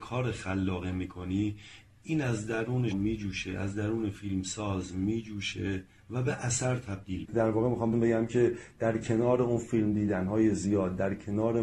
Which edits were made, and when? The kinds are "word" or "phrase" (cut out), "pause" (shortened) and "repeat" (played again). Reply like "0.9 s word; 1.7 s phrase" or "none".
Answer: 2.9 s word; 7.3 s word; 7.9 s word